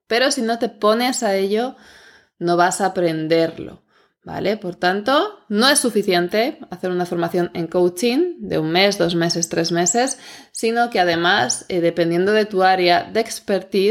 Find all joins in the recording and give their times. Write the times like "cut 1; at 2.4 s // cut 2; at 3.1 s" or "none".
none